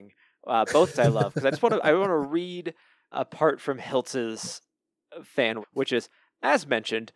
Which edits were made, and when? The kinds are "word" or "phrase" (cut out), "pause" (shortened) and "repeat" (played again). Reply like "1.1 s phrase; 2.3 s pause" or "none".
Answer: 0.9 s word; 3.1 s word; 5.6 s word